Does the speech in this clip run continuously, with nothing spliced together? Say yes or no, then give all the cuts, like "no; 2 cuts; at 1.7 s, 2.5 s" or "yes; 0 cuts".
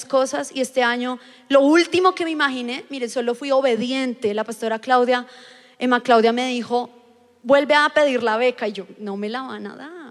yes; 0 cuts